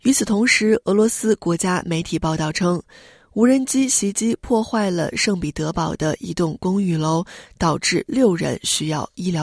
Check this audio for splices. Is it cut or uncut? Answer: uncut